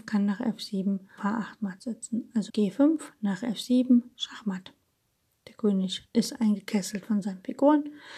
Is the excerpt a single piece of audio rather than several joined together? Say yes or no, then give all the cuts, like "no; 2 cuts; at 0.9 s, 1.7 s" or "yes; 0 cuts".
no; 2 cuts; at 1.2 s, 2.5 s